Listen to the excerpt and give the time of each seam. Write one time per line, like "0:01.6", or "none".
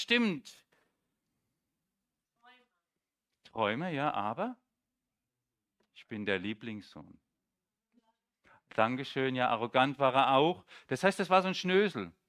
none